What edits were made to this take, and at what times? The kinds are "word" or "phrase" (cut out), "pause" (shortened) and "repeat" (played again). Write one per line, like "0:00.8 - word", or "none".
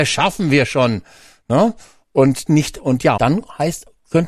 0:02.5 - word
0:03.2 - word